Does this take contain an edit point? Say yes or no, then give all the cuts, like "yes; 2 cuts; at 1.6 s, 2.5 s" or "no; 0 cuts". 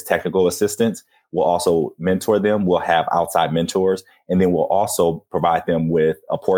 no; 0 cuts